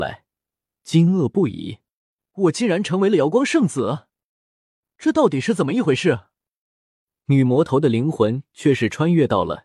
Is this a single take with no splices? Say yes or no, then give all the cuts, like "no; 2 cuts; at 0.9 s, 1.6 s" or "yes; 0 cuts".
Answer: yes; 0 cuts